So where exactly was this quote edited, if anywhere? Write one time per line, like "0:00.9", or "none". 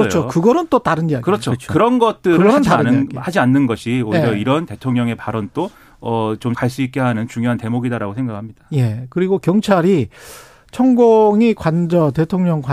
0:06.5